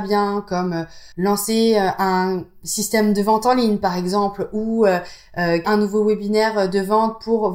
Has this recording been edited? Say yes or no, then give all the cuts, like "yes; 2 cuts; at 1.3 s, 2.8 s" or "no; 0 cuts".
yes; 2 cuts; at 1.1 s, 5.6 s